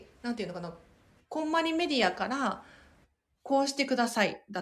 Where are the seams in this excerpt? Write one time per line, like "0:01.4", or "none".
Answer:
none